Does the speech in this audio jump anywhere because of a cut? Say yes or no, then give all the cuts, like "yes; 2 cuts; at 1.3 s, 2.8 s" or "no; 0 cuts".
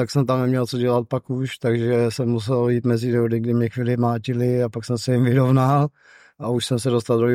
no; 0 cuts